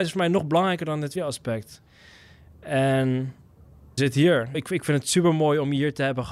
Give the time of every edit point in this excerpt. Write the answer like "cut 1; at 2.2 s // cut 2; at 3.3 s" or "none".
cut 1; at 1.2 s // cut 2; at 4.0 s // cut 3; at 4.5 s